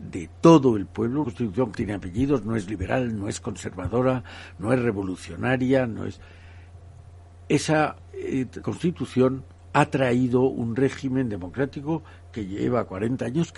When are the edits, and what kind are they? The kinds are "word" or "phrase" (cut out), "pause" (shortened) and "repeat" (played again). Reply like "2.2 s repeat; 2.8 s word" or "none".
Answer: 1.2 s word; 1.7 s word; 8.6 s word